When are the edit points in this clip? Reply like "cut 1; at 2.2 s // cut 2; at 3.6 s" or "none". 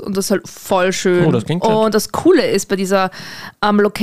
none